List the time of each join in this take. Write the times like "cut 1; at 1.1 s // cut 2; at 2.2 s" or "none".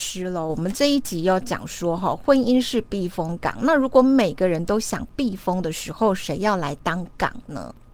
none